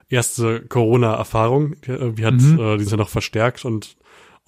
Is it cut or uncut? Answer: cut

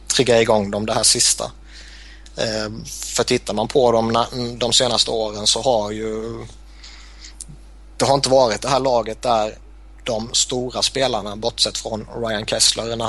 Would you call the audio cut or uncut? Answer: uncut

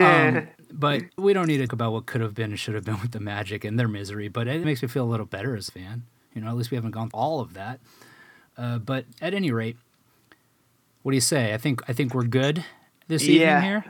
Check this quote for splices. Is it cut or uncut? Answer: cut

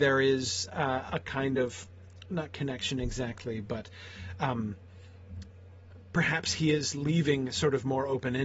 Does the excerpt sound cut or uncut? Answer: uncut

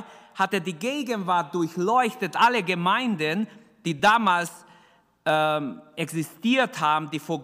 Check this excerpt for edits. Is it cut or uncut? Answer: uncut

